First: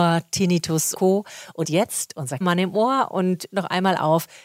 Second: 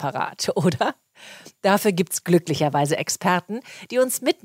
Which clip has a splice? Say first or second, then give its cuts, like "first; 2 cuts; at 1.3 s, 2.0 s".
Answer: first; 4 cuts; at 0.9 s, 1.6 s, 2.4 s, 3.5 s